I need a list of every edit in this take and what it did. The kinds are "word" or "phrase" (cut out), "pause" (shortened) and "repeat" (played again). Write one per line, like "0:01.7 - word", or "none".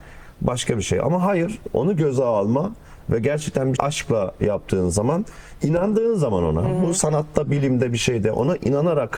0:03.8 - word